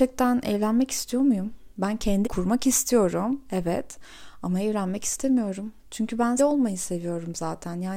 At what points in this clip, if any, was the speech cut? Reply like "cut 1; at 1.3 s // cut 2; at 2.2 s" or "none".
cut 1; at 1.7 s // cut 2; at 2.2 s // cut 3; at 5.8 s // cut 4; at 6.4 s